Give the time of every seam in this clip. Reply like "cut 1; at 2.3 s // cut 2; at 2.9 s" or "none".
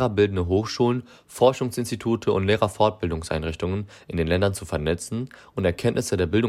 none

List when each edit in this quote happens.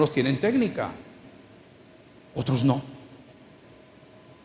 none

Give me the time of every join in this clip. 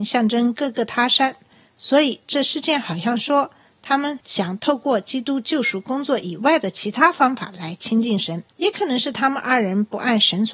cut 1; at 8.5 s

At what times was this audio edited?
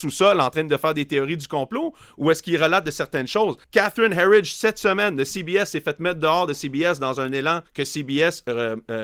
cut 1; at 3.6 s // cut 2; at 7.7 s

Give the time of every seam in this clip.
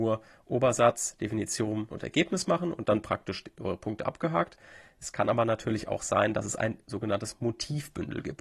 cut 1; at 1.9 s // cut 2; at 2.8 s

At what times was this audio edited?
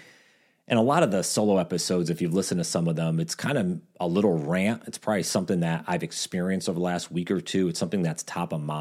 none

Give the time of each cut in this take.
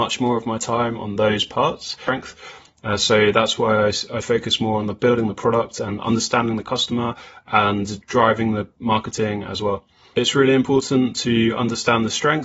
none

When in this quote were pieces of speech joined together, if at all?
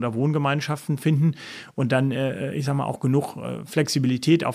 none

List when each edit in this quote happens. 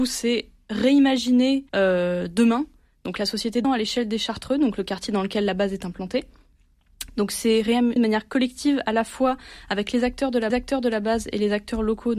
cut 1; at 1.7 s // cut 2; at 3.6 s // cut 3; at 8.0 s // cut 4; at 10.5 s

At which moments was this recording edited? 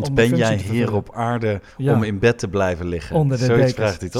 none

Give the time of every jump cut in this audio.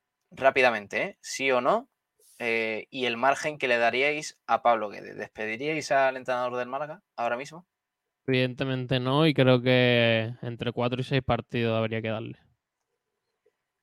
none

